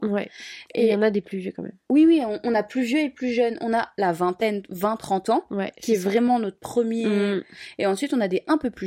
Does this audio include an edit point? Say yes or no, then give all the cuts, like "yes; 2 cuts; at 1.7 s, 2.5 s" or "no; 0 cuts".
yes; 1 cut; at 1.8 s